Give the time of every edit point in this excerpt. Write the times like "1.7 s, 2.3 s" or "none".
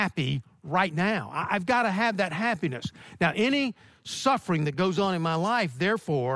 none